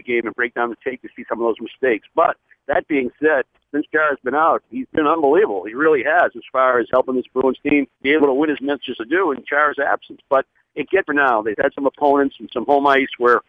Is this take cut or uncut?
cut